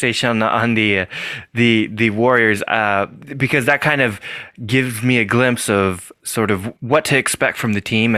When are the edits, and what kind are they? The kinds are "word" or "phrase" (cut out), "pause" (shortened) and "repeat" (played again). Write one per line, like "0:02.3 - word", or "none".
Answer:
0:06.8 - pause